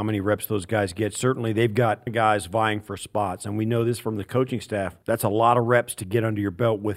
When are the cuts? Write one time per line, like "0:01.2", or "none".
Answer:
0:02.1
0:05.0

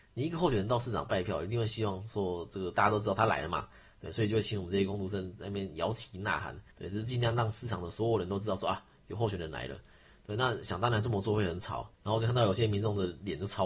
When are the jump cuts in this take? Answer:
0:06.7
0:11.9

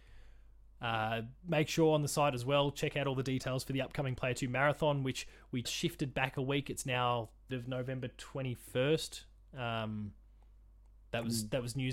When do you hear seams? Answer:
0:05.6
0:07.5

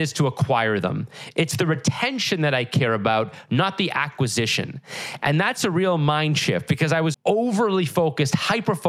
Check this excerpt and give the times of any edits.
0:07.1

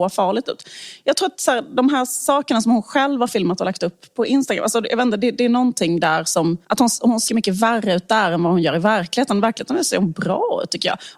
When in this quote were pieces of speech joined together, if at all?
0:06.6
0:07.3

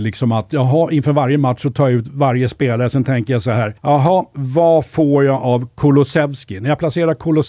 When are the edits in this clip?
0:03.8

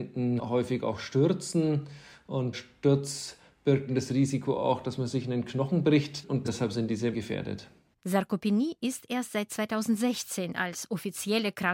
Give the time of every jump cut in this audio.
0:02.5
0:03.9
0:07.1

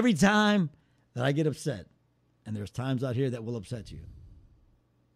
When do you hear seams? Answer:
none

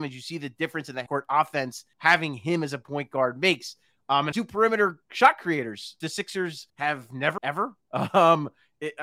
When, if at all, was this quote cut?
0:01.1
0:01.9
0:04.3
0:06.0
0:06.7
0:07.4

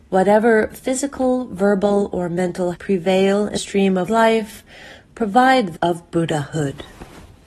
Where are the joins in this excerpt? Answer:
0:02.7
0:03.6
0:04.1
0:05.7

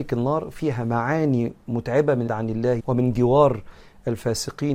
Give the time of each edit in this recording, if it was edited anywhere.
0:02.3
0:02.8

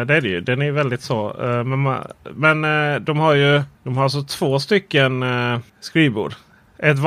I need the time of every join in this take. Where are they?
0:03.7
0:05.7

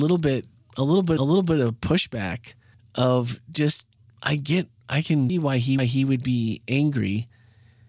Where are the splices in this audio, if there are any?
0:01.2
0:02.7
0:04.0
0:05.3
0:05.8

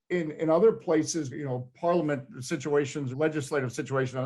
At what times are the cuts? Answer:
0:01.3
0:03.1

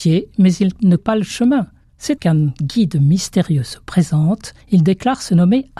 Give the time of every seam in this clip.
0:01.0
0:02.2
0:04.6

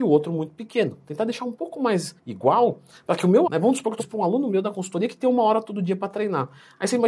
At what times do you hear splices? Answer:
0:02.2
0:03.4
0:04.0

